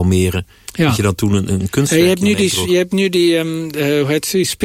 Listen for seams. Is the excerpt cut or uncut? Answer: uncut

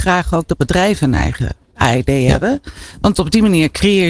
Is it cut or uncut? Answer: uncut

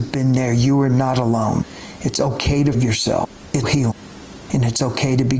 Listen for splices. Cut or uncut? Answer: cut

